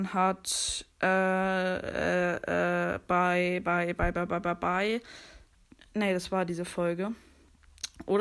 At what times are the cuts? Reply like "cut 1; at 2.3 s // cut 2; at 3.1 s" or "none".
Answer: cut 1; at 0.9 s // cut 2; at 5.7 s